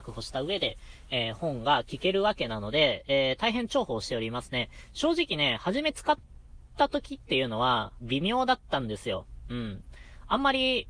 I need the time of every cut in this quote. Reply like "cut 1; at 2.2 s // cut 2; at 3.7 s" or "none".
cut 1; at 8.0 s